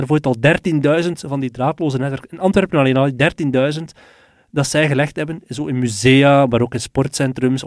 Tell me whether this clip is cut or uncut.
uncut